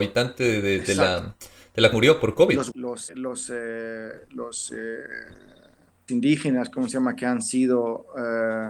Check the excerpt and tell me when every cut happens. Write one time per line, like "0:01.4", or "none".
0:01.9
0:02.7
0:03.1
0:06.1